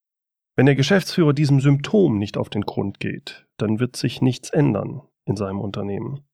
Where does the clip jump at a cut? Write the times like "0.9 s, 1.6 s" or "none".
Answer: 3.5 s